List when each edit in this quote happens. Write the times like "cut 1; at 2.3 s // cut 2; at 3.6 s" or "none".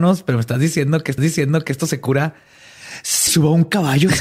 cut 1; at 1.2 s // cut 2; at 3.3 s